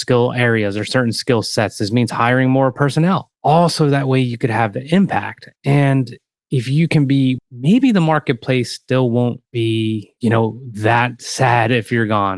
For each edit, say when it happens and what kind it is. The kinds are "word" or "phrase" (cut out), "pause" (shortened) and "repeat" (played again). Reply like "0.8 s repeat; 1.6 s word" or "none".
3.4 s pause; 5.6 s pause; 7.4 s phrase